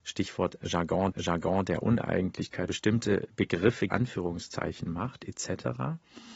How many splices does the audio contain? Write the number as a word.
three